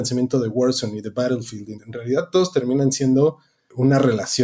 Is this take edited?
yes; 1 cut; at 1.7 s

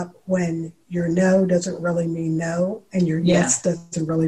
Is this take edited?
no; 0 cuts

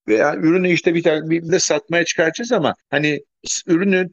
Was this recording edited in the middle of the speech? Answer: yes; 2 cuts; at 1.5 s, 2.8 s

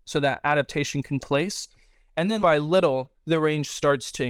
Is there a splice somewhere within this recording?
yes; 2 cuts; at 1.2 s, 2.4 s

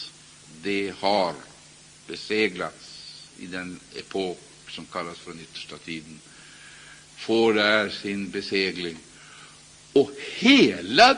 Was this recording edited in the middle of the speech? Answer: no; 0 cuts

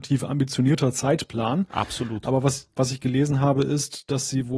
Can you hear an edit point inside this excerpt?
yes; 1 cut; at 2.7 s

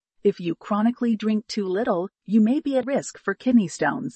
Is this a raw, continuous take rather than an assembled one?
no; 1 cut; at 2.8 s

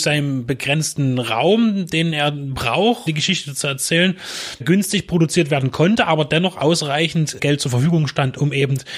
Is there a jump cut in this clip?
yes; 3 cuts; at 3.1 s, 4.6 s, 7.4 s

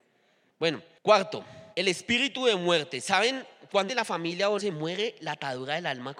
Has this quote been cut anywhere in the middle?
yes; 3 cuts; at 1.7 s, 3.9 s, 4.6 s

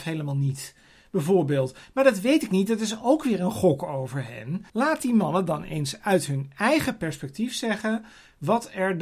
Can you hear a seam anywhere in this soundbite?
yes; 1 cut; at 4.7 s

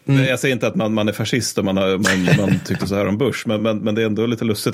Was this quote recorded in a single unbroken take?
yes; 0 cuts

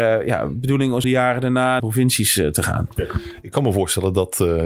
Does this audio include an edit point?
yes; 2 cuts; at 1.0 s, 1.8 s

